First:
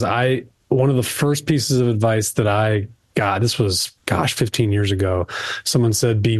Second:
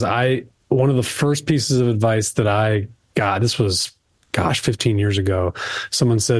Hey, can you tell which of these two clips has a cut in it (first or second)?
first